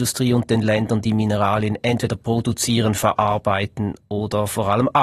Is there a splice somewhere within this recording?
no; 0 cuts

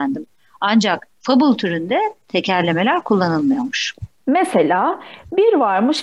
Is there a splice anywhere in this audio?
yes; 1 cut; at 1.1 s

